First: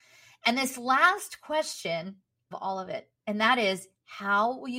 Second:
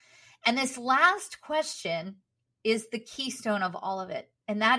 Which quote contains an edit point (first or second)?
first